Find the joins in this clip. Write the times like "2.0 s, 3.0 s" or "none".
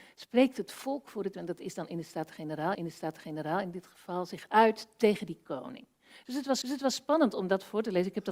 1.3 s, 2.7 s, 6.6 s